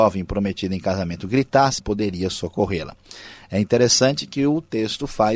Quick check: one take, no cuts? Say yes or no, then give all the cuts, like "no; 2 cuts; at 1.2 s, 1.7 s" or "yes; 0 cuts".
no; 1 cut; at 1.8 s